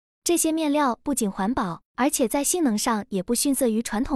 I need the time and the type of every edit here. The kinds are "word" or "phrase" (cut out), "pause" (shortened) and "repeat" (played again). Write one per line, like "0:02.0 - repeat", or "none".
0:01.9 - pause